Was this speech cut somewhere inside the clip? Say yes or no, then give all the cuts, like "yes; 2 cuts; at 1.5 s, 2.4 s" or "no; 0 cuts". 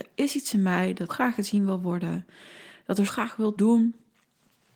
yes; 3 cuts; at 1.1 s, 3.1 s, 3.6 s